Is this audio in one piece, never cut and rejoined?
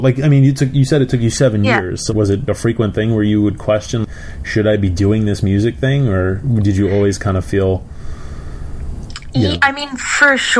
no; 1 cut; at 2.1 s

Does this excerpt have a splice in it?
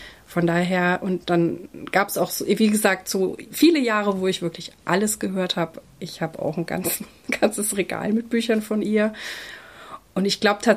no; 0 cuts

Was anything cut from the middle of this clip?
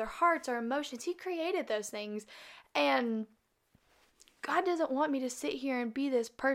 no; 0 cuts

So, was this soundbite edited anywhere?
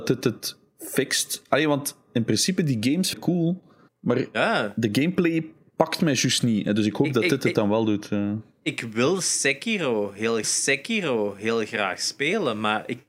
yes; 3 cuts; at 3.1 s, 3.9 s, 10.4 s

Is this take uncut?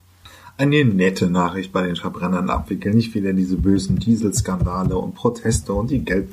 yes; 0 cuts

